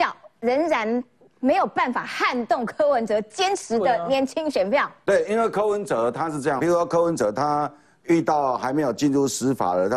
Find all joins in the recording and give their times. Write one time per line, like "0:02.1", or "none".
0:06.6